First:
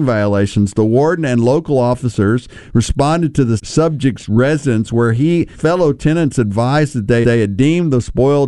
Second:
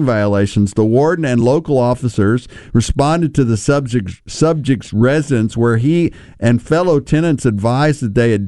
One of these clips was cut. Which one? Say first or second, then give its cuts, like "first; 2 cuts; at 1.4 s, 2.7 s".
first; 3 cuts; at 3.6 s, 5.5 s, 7.2 s